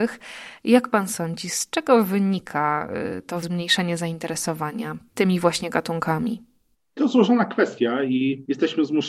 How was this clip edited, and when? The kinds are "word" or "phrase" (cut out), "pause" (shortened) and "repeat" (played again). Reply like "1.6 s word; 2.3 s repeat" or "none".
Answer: 3.4 s word